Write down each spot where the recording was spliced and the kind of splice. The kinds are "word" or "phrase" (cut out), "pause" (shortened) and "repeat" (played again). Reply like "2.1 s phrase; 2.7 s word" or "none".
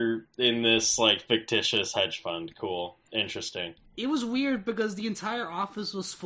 3.9 s pause

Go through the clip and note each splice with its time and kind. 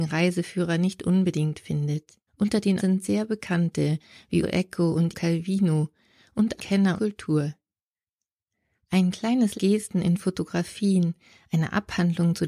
2.3 s pause; 2.8 s word; 4.4 s word; 5.1 s word; 6.6 s word; 7.0 s phrase; 9.5 s phrase

